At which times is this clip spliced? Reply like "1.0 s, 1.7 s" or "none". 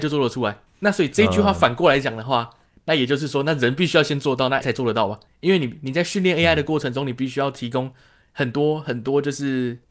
4.6 s

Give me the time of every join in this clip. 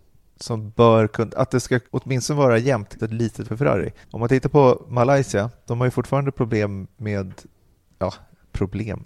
1.3 s, 1.9 s, 3.0 s, 3.4 s, 4.0 s, 6.9 s

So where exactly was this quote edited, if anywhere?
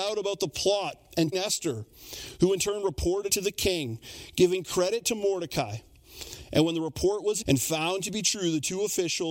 1.3 s, 3.3 s, 7.4 s

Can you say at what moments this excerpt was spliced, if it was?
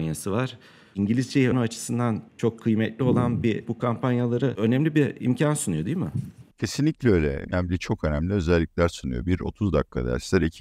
1.5 s, 2.3 s, 3.6 s, 6.5 s

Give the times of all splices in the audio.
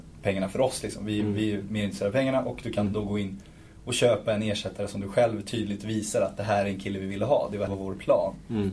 7.7 s

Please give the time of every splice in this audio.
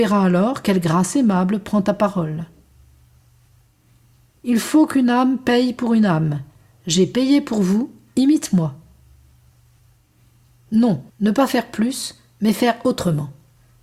11.1 s

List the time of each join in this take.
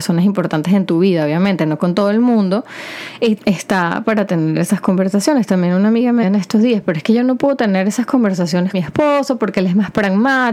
3.4 s, 6.2 s, 8.7 s

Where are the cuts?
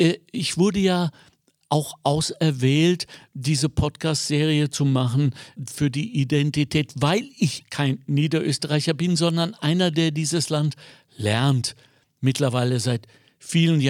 5.6 s, 7.6 s

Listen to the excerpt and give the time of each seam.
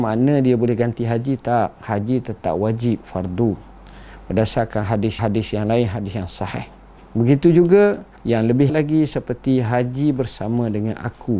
5.2 s, 7.0 s, 8.2 s, 8.7 s

